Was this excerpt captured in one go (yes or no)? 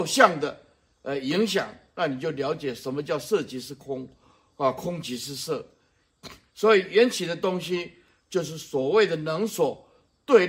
yes